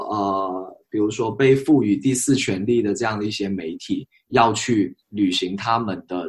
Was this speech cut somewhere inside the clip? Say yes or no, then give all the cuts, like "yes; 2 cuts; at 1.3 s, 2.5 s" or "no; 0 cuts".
yes; 1 cut; at 5.0 s